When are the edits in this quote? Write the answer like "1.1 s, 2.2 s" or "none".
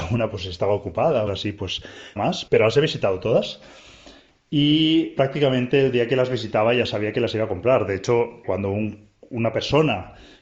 1.3 s, 2.2 s, 2.5 s, 5.2 s, 8.4 s

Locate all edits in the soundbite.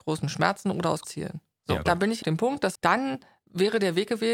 1.0 s, 1.9 s, 2.2 s, 2.8 s

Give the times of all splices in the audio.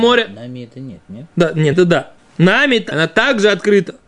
1.3 s, 1.7 s, 2.2 s, 2.9 s

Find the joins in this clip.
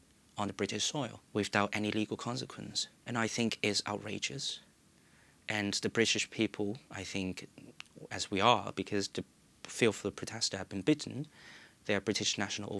1.3 s, 3.0 s

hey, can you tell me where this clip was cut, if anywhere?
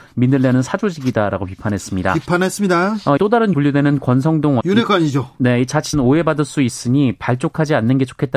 3.2 s, 3.5 s, 4.6 s, 5.9 s

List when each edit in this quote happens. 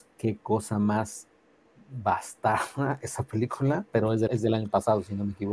4.3 s

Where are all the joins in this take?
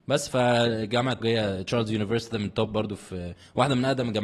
1.2 s, 2.3 s

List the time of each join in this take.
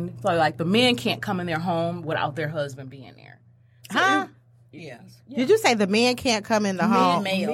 none

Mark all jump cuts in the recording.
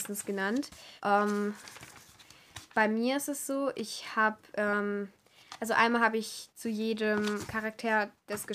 1.0 s, 7.5 s

